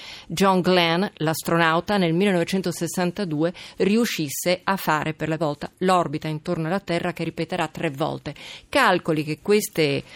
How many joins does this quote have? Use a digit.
1